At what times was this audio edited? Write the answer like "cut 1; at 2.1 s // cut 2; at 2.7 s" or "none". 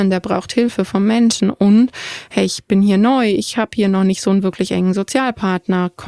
none